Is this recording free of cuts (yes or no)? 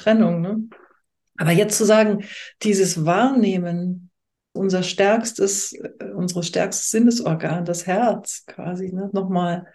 no